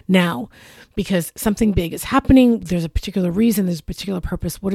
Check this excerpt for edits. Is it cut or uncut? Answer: uncut